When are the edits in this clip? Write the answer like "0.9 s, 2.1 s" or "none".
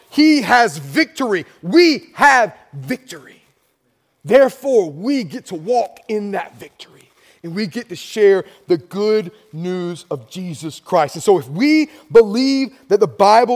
none